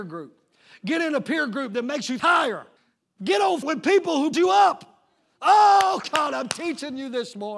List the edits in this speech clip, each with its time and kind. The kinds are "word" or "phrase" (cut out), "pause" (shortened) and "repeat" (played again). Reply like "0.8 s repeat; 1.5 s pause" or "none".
2.2 s word; 2.8 s pause; 3.6 s word; 4.3 s word